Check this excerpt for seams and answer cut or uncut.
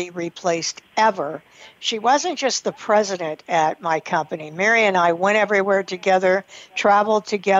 uncut